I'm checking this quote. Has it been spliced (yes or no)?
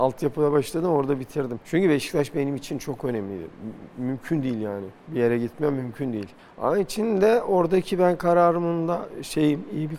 yes